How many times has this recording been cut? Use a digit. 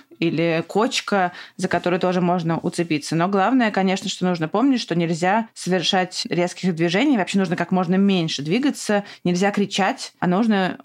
0